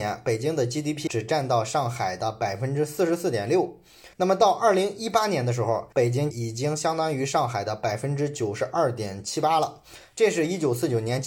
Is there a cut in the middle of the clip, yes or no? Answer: yes